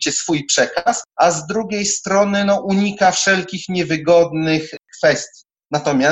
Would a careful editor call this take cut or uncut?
uncut